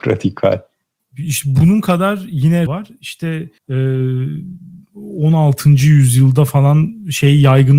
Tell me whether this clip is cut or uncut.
cut